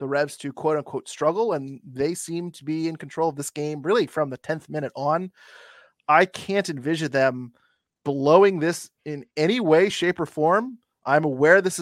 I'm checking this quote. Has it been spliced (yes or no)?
no